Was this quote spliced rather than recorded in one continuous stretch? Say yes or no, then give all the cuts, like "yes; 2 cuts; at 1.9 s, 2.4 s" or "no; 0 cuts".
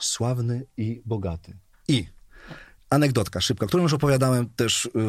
yes; 1 cut; at 1.7 s